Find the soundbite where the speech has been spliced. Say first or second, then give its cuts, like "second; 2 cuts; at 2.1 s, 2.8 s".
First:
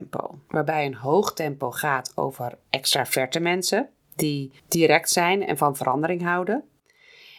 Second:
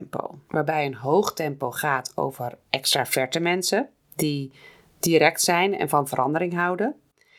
first; 1 cut; at 4.6 s